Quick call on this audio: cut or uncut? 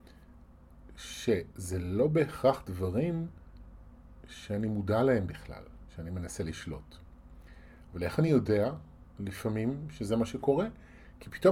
uncut